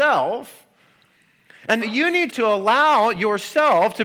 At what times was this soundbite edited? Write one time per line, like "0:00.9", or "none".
0:01.8
0:02.3